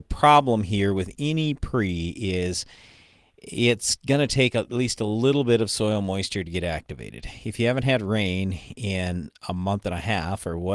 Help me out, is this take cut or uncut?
uncut